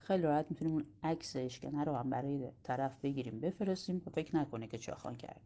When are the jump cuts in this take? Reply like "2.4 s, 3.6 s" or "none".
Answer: none